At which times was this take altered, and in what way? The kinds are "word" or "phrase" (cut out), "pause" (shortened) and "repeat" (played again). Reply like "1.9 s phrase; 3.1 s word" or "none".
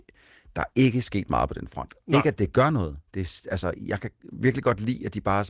3.1 s pause